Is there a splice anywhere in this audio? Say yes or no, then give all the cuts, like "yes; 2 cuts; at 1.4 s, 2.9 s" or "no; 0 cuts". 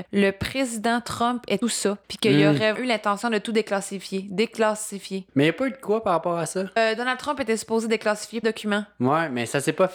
yes; 4 cuts; at 1.6 s, 2.0 s, 2.7 s, 8.4 s